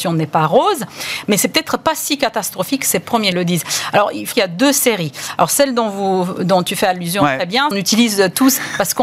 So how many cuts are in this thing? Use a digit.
3